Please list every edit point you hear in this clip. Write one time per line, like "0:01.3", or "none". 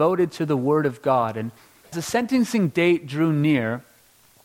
0:01.9

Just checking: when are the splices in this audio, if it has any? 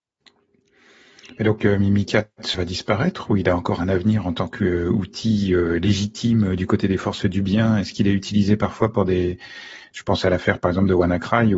0:02.5

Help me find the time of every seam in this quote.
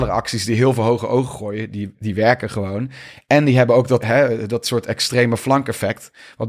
0:01.9
0:04.0

